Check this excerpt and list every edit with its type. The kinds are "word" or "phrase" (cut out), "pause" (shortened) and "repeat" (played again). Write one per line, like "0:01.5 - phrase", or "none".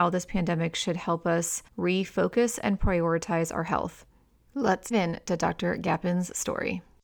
0:01.7 - pause
0:04.9 - word